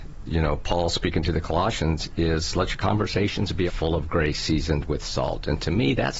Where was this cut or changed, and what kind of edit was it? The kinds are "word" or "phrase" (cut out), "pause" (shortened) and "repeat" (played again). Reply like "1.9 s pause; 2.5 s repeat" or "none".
3.7 s word